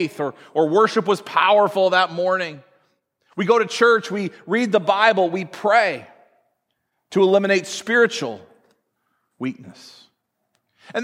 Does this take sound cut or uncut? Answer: uncut